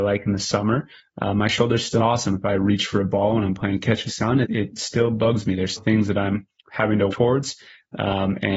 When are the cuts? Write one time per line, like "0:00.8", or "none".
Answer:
0:02.0
0:04.1
0:04.4
0:05.8
0:07.1